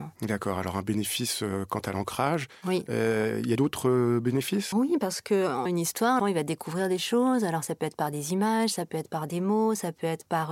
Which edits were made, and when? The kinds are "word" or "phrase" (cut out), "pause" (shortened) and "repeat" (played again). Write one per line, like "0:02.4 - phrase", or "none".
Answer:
0:03.6 - word
0:04.7 - word
0:05.7 - word
0:06.2 - word